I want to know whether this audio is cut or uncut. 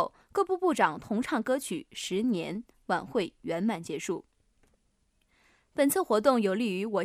uncut